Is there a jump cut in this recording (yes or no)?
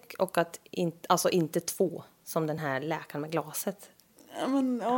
no